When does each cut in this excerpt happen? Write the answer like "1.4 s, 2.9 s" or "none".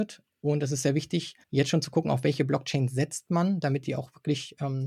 1.4 s